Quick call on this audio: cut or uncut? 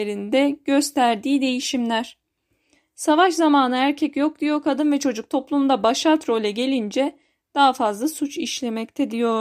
uncut